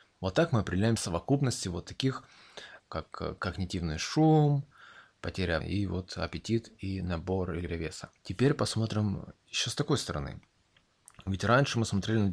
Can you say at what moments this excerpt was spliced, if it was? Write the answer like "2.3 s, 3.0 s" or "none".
1.0 s, 2.8 s, 5.6 s, 7.7 s, 8.2 s